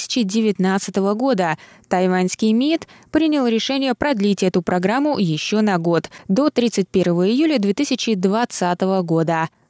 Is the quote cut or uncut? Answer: uncut